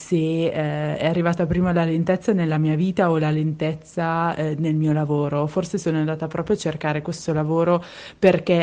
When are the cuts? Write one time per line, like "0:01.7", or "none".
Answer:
none